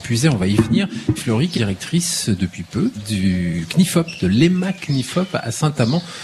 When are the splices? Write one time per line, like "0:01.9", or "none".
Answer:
0:01.2
0:01.5
0:02.9